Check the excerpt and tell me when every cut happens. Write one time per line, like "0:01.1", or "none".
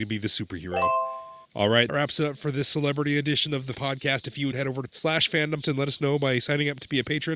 0:01.4
0:01.9
0:03.7
0:04.5
0:04.9
0:05.6